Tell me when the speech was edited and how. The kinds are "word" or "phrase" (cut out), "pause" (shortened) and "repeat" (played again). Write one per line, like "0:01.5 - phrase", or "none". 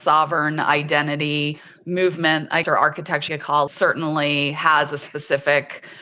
0:02.6 - word
0:03.3 - word
0:03.7 - word